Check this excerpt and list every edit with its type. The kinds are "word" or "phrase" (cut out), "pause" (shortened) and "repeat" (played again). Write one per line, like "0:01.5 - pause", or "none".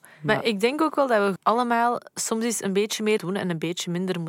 0:01.4 - word
0:03.2 - word